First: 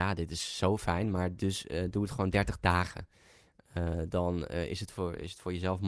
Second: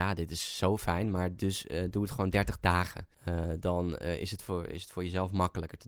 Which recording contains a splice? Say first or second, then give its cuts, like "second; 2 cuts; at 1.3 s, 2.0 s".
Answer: second; 1 cut; at 3.1 s